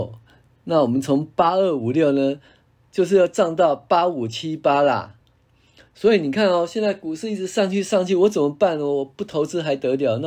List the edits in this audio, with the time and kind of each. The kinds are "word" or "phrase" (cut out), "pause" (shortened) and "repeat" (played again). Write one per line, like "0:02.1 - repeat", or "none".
none

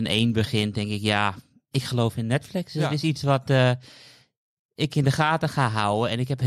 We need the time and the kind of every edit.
0:01.7 - word

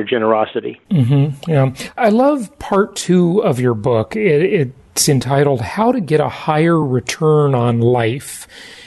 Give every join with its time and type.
none

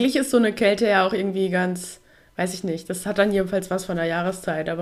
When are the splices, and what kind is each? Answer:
none

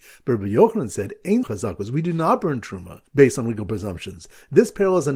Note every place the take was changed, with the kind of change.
0:01.4 - word
0:03.1 - pause

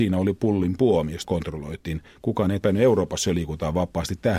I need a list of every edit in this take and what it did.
0:01.2 - phrase
0:02.6 - word

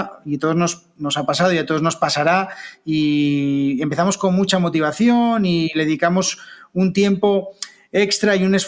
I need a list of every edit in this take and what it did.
none

